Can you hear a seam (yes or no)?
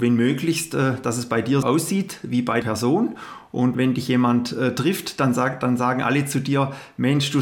yes